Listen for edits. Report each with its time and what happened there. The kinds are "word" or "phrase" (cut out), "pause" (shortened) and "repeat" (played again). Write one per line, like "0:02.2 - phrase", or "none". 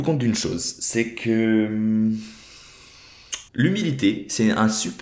0:03.5 - pause